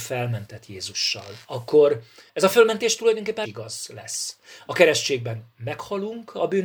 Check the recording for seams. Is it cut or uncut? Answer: cut